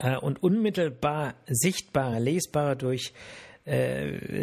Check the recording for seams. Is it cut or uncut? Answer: uncut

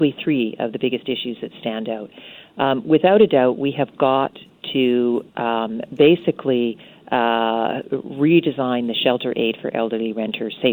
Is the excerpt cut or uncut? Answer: uncut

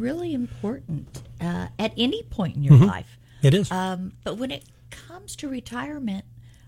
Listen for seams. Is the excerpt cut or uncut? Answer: cut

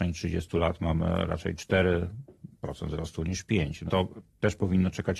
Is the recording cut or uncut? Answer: cut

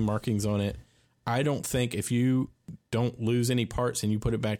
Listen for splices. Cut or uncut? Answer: uncut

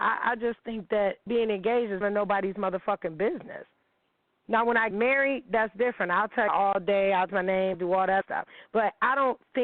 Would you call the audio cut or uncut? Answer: cut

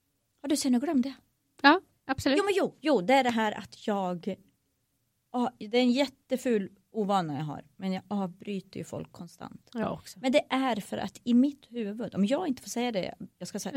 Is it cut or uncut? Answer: uncut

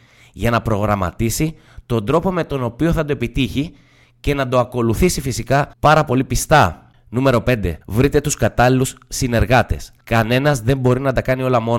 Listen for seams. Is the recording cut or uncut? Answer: cut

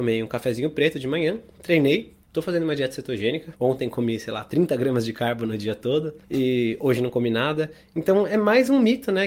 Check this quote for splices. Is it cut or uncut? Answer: cut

